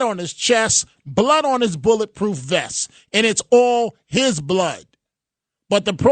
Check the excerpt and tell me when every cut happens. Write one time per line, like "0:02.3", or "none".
none